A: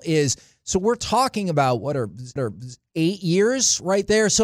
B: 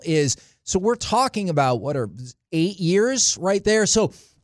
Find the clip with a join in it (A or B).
A